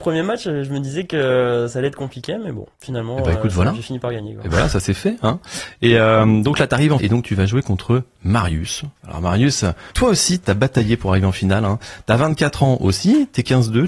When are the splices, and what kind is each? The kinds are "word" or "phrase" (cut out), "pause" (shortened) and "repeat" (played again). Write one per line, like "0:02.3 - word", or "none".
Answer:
0:02.7 - pause
0:07.0 - word
0:09.0 - pause
0:09.9 - pause
0:10.4 - word